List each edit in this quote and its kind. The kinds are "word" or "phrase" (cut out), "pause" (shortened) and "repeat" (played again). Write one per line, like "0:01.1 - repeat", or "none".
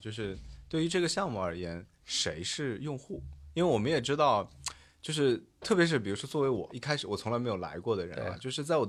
0:06.7 - word